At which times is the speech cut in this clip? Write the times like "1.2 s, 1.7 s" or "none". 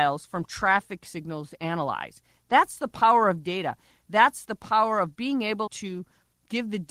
5.7 s